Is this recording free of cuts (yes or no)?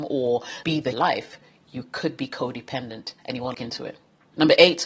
no